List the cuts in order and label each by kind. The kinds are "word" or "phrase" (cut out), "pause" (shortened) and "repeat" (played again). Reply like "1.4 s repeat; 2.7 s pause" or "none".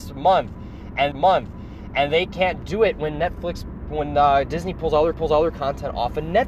1.1 s repeat; 5.1 s repeat